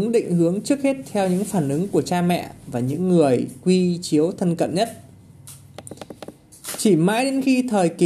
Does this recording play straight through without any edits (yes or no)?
yes